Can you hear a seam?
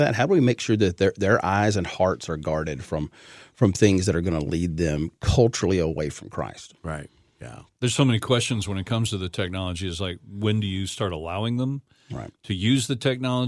no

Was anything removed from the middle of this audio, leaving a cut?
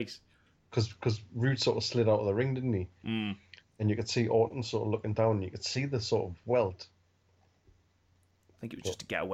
no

